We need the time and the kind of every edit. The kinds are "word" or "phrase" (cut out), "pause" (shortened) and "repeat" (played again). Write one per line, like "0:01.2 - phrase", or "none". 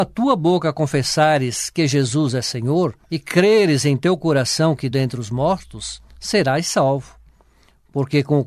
0:03.0 - pause
0:04.9 - phrase
0:06.1 - pause